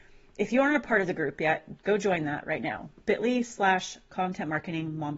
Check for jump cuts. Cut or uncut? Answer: uncut